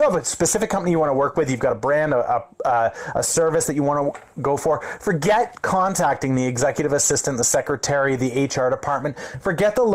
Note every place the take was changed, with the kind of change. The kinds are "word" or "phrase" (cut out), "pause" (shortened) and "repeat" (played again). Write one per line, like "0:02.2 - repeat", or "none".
none